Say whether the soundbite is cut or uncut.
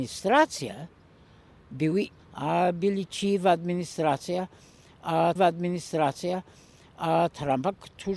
cut